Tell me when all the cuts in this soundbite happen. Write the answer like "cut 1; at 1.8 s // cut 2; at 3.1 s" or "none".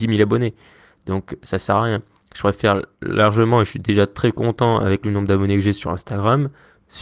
none